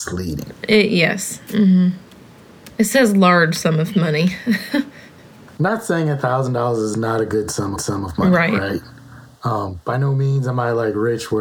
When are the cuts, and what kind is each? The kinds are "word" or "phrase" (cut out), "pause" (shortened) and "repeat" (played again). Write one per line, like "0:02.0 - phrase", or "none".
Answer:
0:02.7 - pause
0:07.8 - repeat